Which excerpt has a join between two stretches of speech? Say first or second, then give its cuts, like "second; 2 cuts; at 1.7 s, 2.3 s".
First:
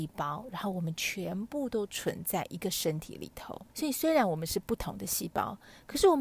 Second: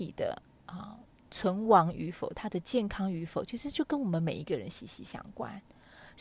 first; 1 cut; at 3.7 s